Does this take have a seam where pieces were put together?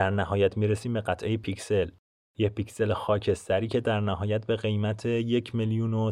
no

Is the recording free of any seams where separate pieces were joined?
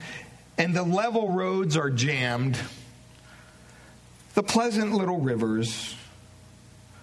yes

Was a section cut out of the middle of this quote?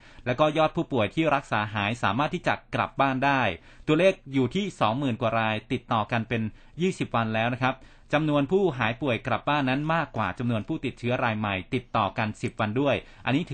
no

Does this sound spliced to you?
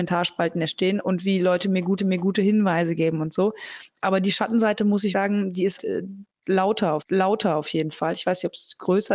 yes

